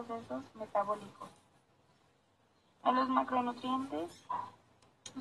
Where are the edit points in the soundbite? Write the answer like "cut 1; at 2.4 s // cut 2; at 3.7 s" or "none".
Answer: none